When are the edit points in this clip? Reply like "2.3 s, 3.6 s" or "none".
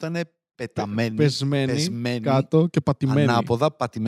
none